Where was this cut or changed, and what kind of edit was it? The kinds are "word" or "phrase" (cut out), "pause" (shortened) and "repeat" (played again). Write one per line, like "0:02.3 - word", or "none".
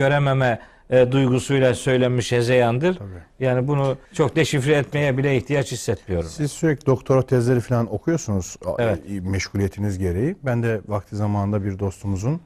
0:04.1 - pause

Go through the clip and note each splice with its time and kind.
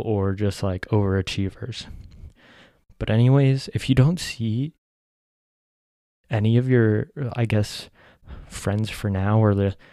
none

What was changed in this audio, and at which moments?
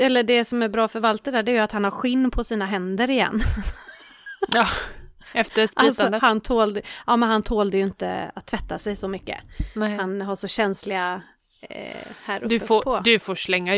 none

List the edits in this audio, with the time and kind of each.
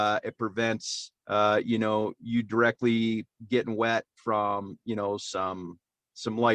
0:01.2 - pause

